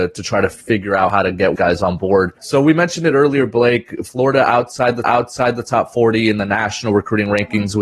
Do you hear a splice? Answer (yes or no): yes